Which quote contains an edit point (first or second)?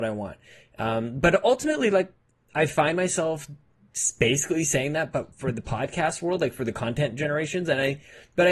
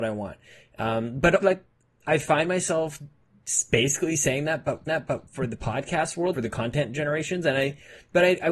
second